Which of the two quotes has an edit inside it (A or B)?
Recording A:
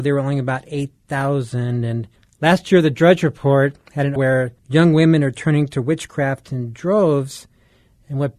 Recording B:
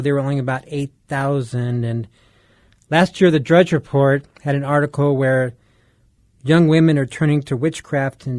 A